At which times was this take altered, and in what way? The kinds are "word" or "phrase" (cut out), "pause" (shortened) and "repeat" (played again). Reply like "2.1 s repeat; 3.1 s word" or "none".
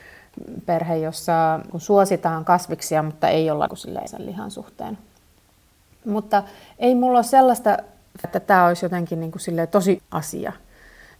1.7 s word; 3.7 s word; 4.1 s word; 8.2 s word; 10.0 s word